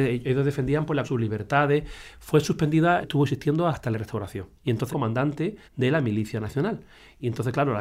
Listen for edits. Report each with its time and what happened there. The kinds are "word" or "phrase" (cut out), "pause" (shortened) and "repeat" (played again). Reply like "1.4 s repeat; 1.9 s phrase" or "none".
1.0 s word; 3.0 s phrase; 3.7 s word; 4.6 s pause; 4.9 s phrase; 5.6 s pause